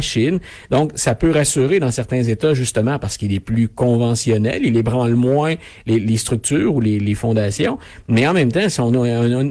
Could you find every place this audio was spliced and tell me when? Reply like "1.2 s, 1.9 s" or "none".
none